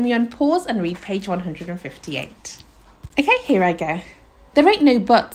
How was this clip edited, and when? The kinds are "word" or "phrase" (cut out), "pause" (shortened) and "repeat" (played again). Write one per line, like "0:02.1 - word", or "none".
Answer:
0:03.1 - pause

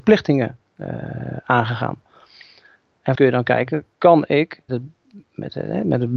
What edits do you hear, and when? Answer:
0:03.1 - word
0:03.9 - pause
0:04.7 - word

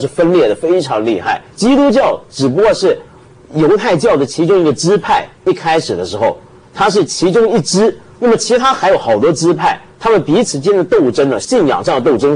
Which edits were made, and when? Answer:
0:01.5 - pause

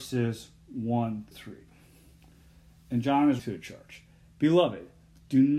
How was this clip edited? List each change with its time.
0:01.3 - word
0:03.4 - word

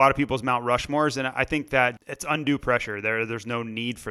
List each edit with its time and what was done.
0:02.0 - word

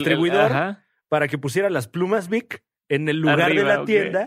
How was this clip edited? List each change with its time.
0:02.7 - pause

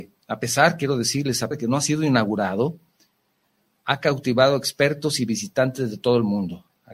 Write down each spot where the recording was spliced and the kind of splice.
0:01.5 - word

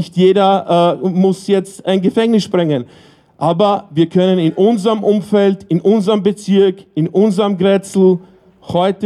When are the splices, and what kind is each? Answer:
none

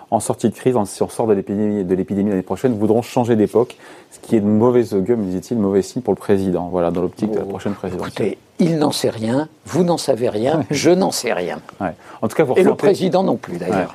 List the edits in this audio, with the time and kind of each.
none

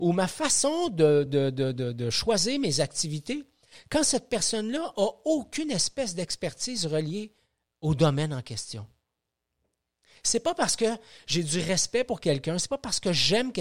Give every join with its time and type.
none

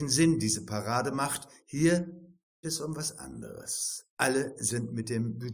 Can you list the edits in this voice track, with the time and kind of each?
0:02.6 - word
0:04.1 - pause

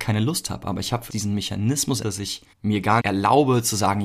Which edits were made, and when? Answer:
0:01.1 - phrase
0:02.0 - word
0:02.5 - pause
0:03.0 - word

